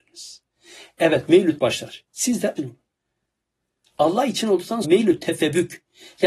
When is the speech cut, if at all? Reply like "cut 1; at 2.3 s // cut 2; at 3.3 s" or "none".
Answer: cut 1; at 1.6 s // cut 2; at 2.6 s // cut 3; at 4.8 s

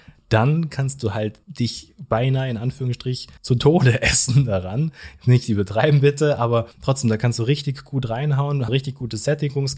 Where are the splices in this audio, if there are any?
cut 1; at 1.4 s // cut 2; at 3.4 s // cut 3; at 6.7 s // cut 4; at 8.7 s

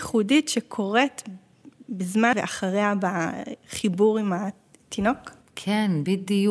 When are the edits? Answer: cut 1; at 2.3 s

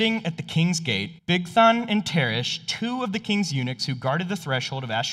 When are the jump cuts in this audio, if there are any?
cut 1; at 1.2 s

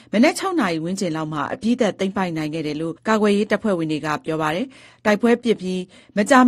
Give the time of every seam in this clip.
cut 1; at 3.0 s

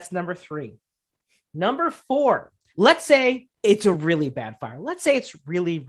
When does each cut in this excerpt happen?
none

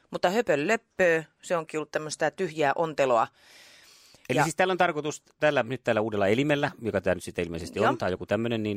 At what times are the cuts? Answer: cut 1; at 4.2 s

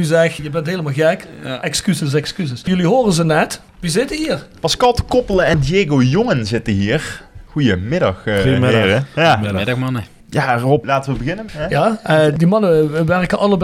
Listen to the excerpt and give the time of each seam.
cut 1; at 3.7 s

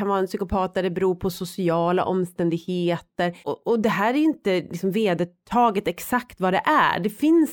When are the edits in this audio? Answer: cut 1; at 3.4 s

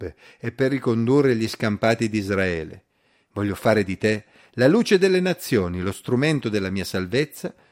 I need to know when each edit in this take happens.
none

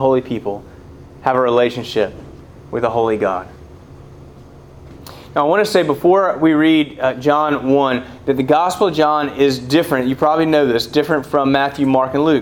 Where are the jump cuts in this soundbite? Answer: none

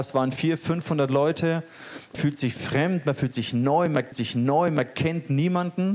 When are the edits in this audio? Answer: cut 1; at 2.1 s // cut 2; at 4.1 s

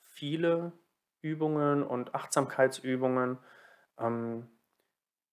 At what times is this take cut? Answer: none

